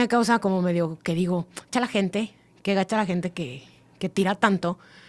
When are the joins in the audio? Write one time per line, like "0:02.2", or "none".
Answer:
0:01.7